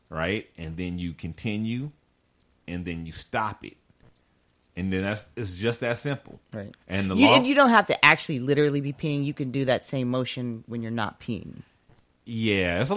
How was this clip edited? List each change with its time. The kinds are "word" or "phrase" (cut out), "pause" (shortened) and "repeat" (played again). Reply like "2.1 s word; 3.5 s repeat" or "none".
none